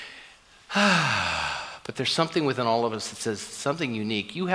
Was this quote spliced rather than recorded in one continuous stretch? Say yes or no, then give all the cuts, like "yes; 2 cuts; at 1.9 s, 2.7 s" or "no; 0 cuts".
no; 0 cuts